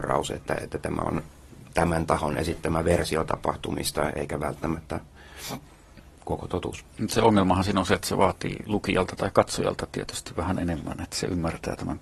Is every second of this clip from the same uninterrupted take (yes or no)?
no